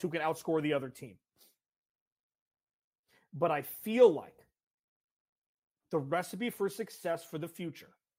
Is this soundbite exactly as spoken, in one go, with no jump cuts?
yes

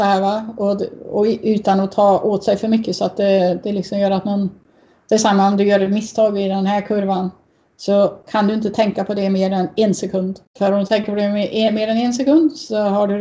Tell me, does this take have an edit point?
yes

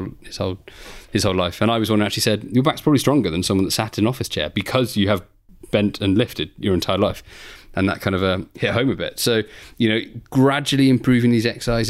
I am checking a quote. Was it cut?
no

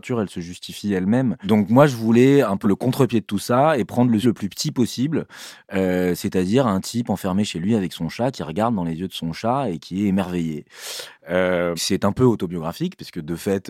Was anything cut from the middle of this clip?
yes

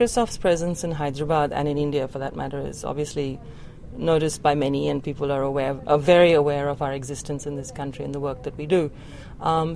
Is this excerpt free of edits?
yes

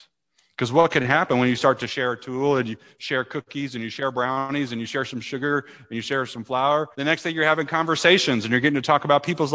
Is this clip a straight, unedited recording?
no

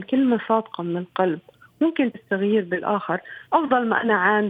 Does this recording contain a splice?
yes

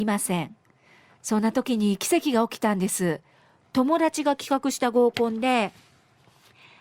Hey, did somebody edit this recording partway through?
no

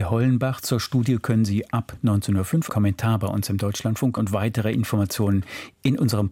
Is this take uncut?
no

